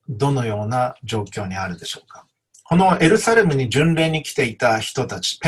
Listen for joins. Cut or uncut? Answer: uncut